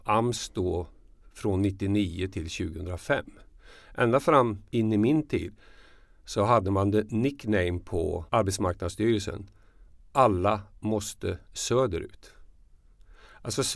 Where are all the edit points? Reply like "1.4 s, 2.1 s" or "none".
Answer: 4.7 s, 8.3 s